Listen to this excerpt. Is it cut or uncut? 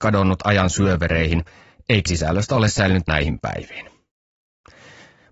cut